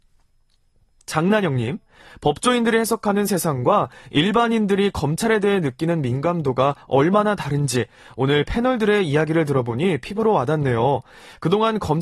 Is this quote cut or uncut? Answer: uncut